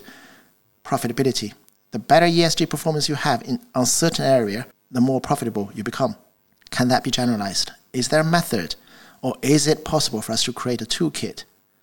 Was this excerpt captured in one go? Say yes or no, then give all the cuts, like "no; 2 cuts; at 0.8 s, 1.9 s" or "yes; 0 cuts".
yes; 0 cuts